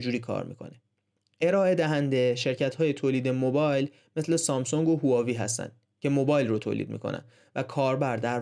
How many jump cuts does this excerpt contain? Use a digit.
0